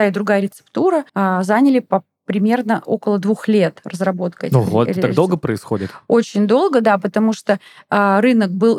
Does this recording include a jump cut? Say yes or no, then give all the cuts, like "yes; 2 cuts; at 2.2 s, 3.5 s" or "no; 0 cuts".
yes; 1 cut; at 1.1 s